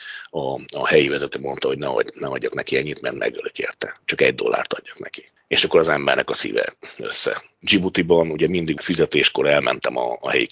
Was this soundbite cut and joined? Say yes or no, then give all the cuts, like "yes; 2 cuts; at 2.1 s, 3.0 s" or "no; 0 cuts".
no; 0 cuts